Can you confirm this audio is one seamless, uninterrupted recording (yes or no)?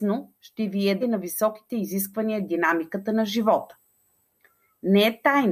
no